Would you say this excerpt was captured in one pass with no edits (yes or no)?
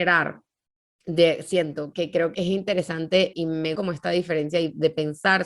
no